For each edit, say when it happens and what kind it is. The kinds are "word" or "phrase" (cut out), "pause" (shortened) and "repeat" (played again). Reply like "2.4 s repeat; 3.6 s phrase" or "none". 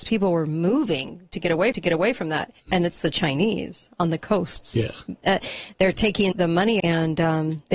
1.7 s repeat; 2.6 s pause; 6.3 s word; 6.8 s word